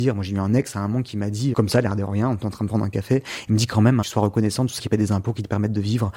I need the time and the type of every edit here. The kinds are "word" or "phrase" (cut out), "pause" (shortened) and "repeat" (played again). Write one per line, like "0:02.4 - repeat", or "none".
0:01.5 - word
0:04.0 - phrase
0:04.8 - word